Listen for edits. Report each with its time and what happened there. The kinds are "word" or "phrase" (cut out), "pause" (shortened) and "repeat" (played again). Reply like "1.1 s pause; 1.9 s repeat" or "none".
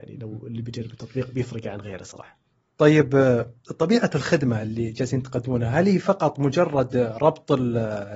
none